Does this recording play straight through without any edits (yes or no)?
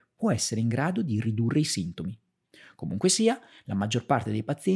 yes